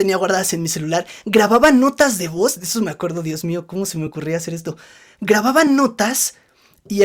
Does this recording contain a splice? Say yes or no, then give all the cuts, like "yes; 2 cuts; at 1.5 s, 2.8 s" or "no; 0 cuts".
no; 0 cuts